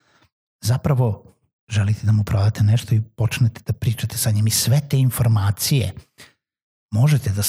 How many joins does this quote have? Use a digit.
1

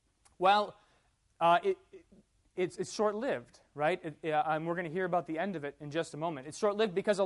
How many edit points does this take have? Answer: 0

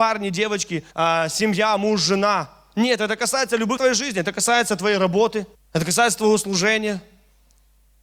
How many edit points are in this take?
3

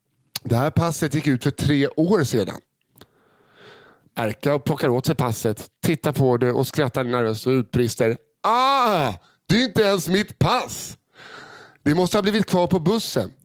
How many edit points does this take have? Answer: 0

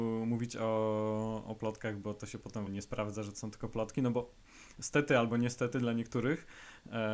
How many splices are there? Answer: 1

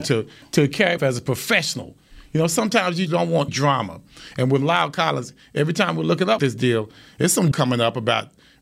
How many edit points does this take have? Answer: 5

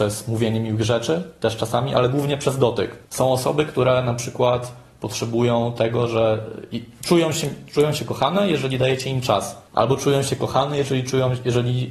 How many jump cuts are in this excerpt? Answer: 2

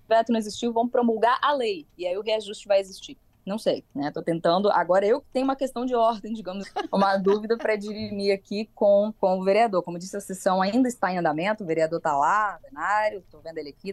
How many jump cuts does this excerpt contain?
5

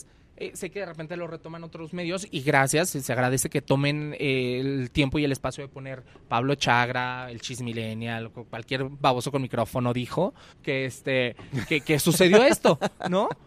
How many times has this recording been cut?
1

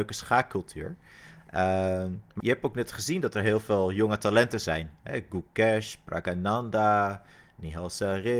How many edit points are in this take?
1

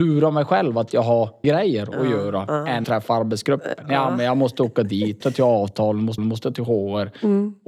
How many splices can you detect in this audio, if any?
4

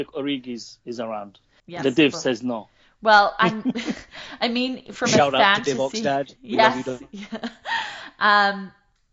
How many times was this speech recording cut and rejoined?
0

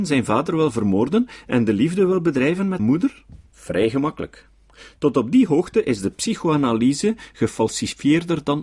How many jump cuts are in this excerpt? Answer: 2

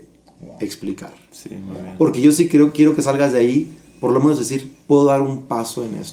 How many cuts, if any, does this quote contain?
1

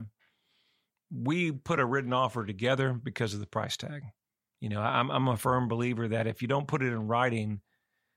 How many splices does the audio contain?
0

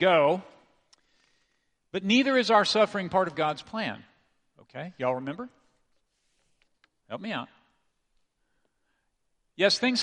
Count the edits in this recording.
0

